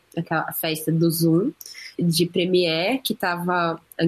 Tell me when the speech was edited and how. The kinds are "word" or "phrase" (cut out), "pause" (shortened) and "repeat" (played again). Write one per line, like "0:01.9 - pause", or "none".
0:01.9 - word